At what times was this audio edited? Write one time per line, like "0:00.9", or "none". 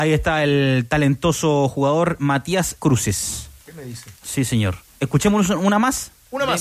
0:02.8
0:04.2
0:04.9